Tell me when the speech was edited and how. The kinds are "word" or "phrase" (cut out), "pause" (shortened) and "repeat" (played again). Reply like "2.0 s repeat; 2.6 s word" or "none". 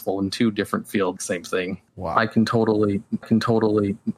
1.2 s phrase; 1.9 s pause; 3.2 s repeat